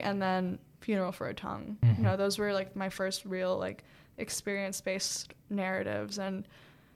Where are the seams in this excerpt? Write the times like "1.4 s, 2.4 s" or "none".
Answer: none

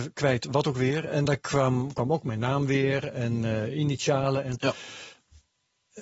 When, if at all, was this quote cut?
none

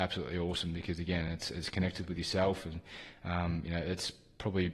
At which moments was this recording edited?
none

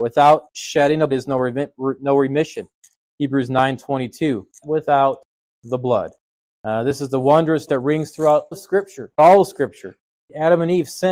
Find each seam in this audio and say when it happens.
1.1 s, 4.6 s, 7.7 s, 8.5 s, 9.2 s

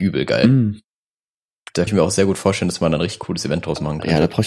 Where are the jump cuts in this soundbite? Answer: 1.9 s

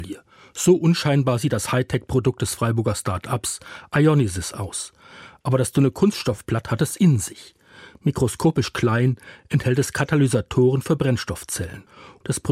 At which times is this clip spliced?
none

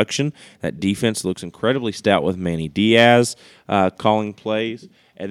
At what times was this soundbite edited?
none

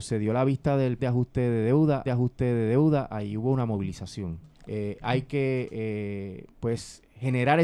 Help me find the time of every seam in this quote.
1.0 s, 2.0 s, 4.5 s, 6.5 s

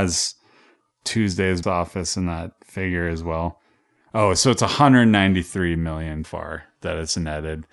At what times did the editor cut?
1.6 s, 6.2 s

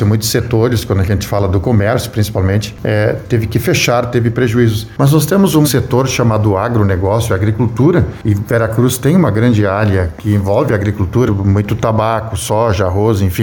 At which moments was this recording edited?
5.6 s, 11.3 s

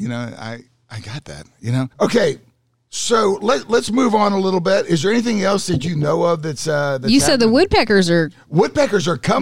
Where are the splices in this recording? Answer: 1.9 s

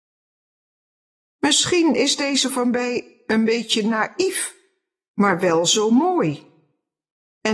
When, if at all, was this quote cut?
2.5 s

